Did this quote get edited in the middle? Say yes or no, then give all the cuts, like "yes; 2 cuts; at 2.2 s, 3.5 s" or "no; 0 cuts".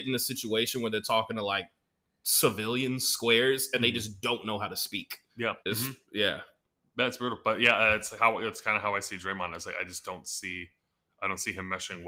yes; 1 cut; at 5.6 s